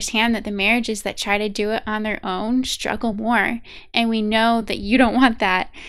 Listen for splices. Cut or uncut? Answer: uncut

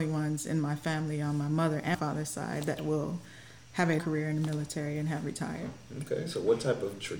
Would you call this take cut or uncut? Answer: cut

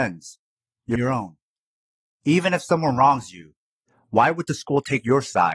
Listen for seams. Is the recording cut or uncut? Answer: cut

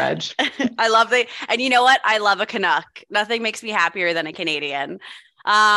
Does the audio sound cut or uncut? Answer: uncut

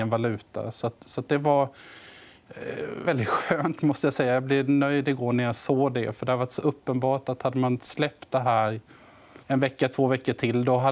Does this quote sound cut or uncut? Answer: cut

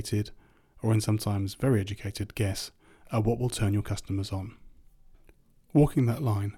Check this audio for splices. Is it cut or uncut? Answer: uncut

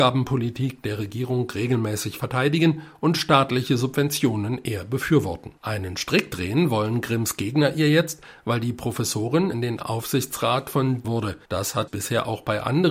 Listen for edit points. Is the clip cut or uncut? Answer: cut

